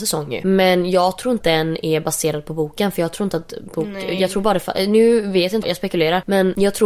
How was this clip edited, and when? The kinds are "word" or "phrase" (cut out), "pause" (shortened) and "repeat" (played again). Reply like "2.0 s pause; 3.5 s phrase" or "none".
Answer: 1.4 s word; 5.6 s word